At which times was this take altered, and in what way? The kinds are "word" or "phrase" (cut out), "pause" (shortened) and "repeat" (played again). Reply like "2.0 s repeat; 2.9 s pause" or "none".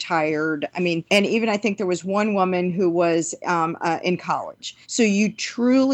1.1 s pause; 4.8 s pause